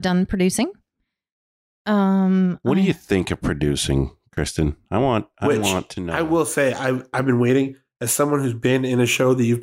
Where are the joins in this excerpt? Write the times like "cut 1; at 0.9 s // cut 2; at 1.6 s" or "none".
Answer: none